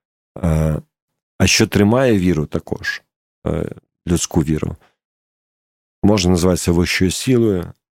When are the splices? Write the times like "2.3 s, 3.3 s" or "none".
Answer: none